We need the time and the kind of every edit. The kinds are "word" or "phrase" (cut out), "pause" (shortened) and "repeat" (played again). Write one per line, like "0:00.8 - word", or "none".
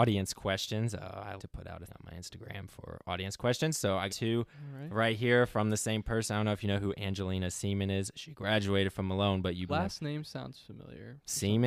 0:01.4 - word
0:01.9 - word
0:04.1 - word
0:09.7 - word